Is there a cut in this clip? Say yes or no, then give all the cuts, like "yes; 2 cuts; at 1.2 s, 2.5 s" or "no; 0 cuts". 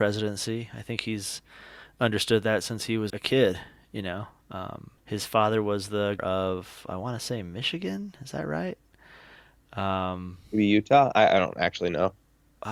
yes; 3 cuts; at 3.1 s, 5.0 s, 6.2 s